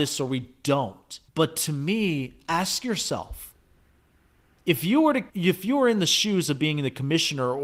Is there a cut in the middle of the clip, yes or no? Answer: yes